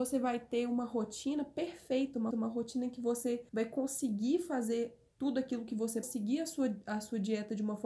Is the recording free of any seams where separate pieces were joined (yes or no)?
no